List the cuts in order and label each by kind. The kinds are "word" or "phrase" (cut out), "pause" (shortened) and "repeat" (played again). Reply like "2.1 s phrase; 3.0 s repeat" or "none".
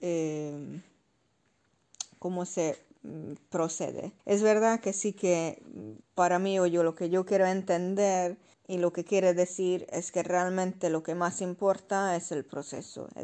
4.2 s pause; 6.0 s pause; 8.5 s pause